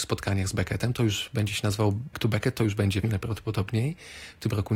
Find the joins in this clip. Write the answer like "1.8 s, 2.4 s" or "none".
2.1 s, 3.0 s